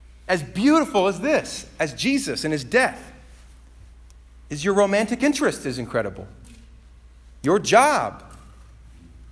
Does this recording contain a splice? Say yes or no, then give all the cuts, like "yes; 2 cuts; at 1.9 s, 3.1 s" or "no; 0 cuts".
no; 0 cuts